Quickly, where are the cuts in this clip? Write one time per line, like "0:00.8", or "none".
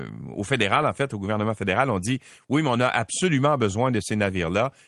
none